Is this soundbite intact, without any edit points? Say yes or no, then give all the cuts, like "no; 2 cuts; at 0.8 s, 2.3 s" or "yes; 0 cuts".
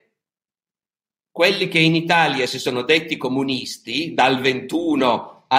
yes; 0 cuts